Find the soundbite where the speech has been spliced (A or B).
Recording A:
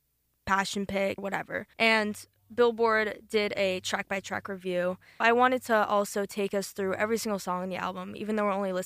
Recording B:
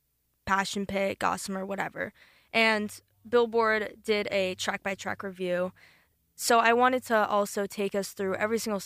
A